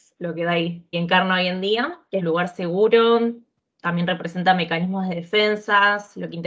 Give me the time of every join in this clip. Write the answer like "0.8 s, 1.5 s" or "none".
0.9 s, 2.2 s